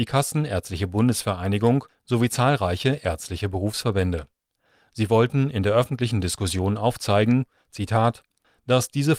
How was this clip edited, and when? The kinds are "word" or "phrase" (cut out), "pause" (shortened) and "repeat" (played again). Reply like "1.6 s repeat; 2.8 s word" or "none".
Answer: none